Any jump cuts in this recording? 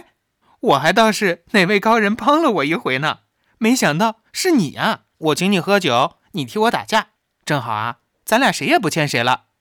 yes; 1 cut; at 5.1 s

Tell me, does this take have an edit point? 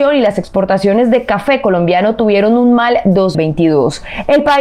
yes; 1 cut; at 3.3 s

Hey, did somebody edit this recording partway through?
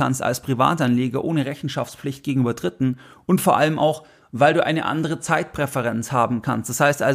no; 0 cuts

